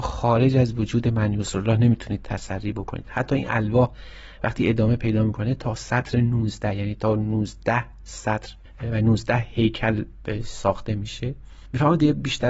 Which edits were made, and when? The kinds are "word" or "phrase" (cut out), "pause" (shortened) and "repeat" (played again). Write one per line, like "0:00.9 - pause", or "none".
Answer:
none